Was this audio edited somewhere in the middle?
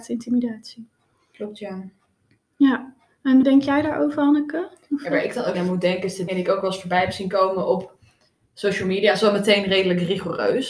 yes; 3 cuts; at 3.4 s, 5.5 s, 6.3 s

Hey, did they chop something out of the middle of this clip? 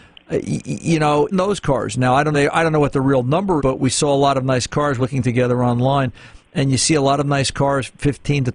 yes; 4 cuts; at 1.3 s, 2.3 s, 3.6 s, 5.0 s

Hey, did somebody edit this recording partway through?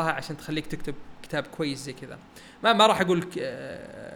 no; 0 cuts

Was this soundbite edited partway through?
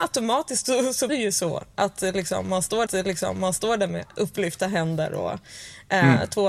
yes; 2 cuts; at 1.1 s, 2.9 s

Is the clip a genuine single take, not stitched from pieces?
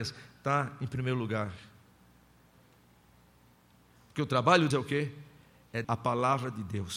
no; 2 cuts; at 4.7 s, 5.8 s

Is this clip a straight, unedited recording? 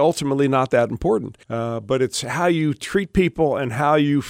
no; 1 cut; at 1.4 s

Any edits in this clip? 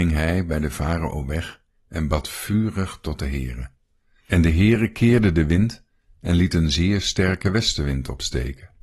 no; 0 cuts

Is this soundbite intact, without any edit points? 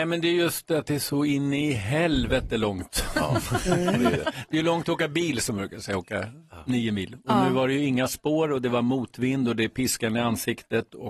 yes; 0 cuts

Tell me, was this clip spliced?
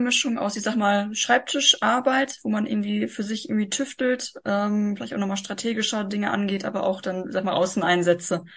no; 0 cuts

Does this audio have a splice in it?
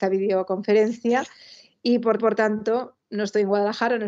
yes; 1 cut; at 2.2 s

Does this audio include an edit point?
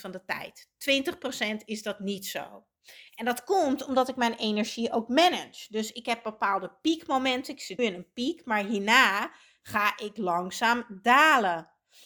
yes; 1 cut; at 7.8 s

